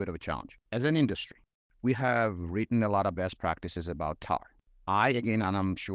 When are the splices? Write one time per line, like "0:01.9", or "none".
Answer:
none